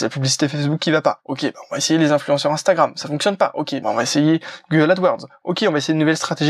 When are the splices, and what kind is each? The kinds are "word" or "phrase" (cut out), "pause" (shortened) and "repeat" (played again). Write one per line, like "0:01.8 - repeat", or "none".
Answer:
0:03.8 - word